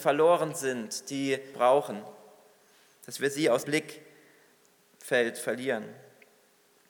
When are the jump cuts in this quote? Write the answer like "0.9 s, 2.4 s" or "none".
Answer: 1.5 s, 3.6 s